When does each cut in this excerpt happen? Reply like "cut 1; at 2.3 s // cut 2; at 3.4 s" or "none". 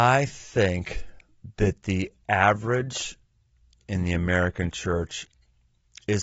cut 1; at 1.5 s // cut 2; at 3.8 s